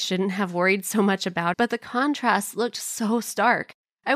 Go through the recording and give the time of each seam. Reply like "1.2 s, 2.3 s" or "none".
1.5 s